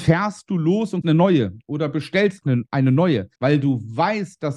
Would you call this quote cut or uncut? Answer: cut